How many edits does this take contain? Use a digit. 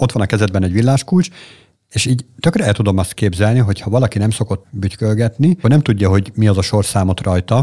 2